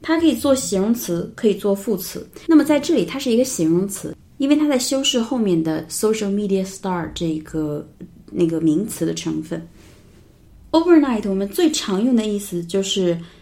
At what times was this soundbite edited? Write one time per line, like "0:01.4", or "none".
none